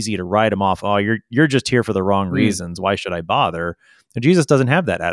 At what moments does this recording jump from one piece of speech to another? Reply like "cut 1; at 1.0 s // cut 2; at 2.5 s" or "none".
none